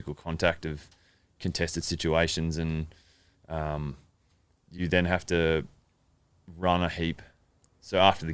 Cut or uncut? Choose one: uncut